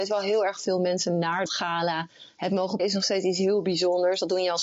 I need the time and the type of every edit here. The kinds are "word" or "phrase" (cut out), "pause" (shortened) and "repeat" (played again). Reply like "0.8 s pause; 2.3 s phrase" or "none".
1.5 s word; 2.8 s word